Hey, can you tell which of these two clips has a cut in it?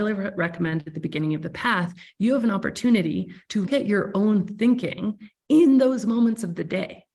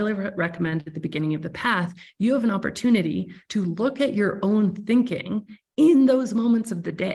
first; 1 cut; at 3.7 s

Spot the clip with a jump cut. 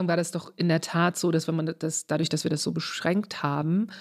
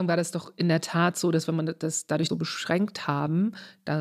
second; 1 cut; at 2.3 s

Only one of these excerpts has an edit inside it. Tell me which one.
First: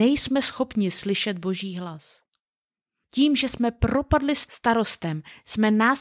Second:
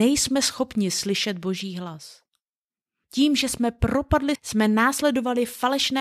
second; 1 cut; at 4.4 s

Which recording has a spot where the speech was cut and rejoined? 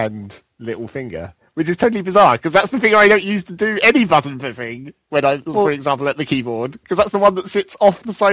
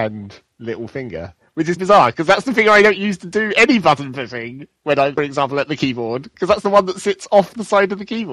second; 2 cuts; at 1.8 s, 5.2 s

